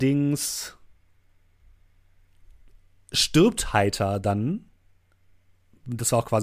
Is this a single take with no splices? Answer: yes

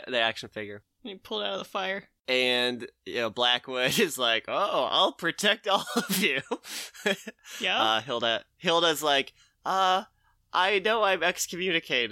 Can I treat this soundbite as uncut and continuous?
yes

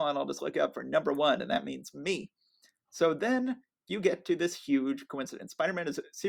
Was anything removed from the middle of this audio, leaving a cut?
no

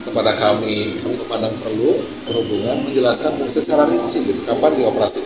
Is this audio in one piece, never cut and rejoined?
no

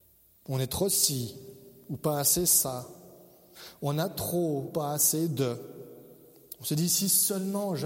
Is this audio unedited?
no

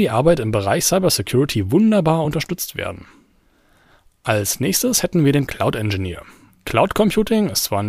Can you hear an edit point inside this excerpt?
no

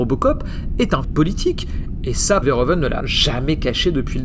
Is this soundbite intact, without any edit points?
no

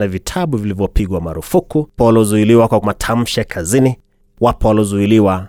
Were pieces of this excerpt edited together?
yes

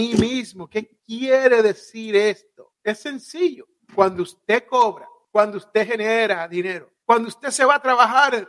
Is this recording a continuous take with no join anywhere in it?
yes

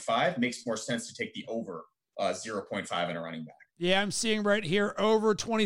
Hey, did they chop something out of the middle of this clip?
no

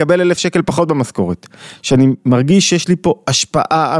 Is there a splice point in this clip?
no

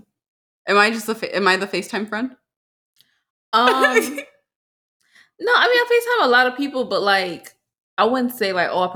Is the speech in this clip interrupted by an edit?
no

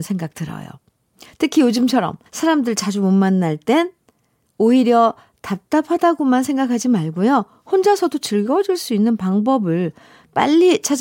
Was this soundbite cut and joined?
yes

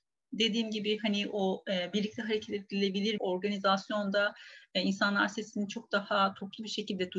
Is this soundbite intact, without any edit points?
no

